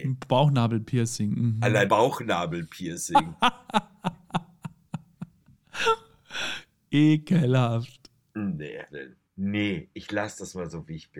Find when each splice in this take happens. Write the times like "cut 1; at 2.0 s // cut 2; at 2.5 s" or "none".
cut 1; at 1.9 s // cut 2; at 8.9 s // cut 3; at 9.2 s

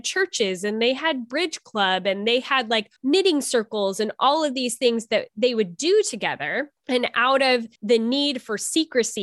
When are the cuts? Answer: cut 1; at 3.0 s // cut 2; at 6.8 s // cut 3; at 7.8 s

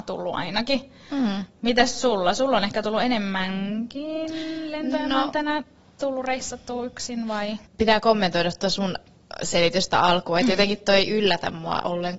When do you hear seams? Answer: none

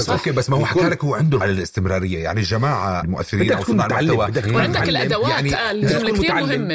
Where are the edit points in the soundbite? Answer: cut 1; at 1.4 s // cut 2; at 3.0 s

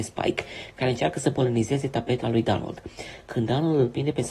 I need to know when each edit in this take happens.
cut 1; at 2.2 s

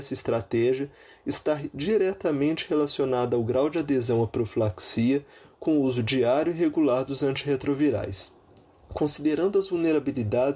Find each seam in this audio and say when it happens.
none

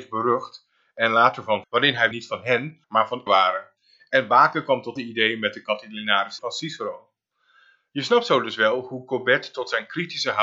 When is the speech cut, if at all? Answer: cut 1; at 1.6 s // cut 2; at 2.1 s // cut 3; at 2.8 s // cut 4; at 3.3 s // cut 5; at 5.0 s // cut 6; at 6.4 s

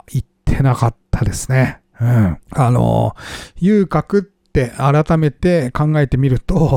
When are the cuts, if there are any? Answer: cut 1; at 2.4 s

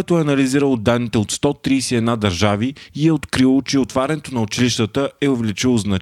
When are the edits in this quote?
none

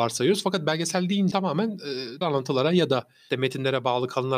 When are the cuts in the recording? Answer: cut 1; at 1.3 s // cut 2; at 2.2 s // cut 3; at 3.3 s

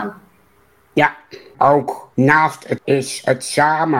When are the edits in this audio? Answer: cut 1; at 1.5 s // cut 2; at 2.1 s // cut 3; at 2.8 s

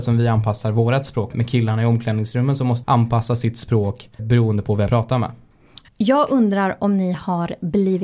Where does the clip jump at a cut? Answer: cut 1; at 1.3 s // cut 2; at 2.8 s // cut 3; at 4.2 s // cut 4; at 4.9 s

